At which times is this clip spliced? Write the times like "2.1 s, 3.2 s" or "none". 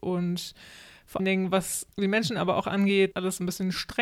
1.2 s, 1.9 s, 3.1 s